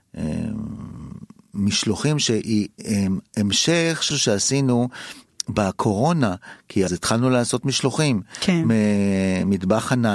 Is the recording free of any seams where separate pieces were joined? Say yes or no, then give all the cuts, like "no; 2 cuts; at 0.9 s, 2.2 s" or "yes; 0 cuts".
no; 4 cuts; at 1.4 s, 2.8 s, 4.1 s, 6.9 s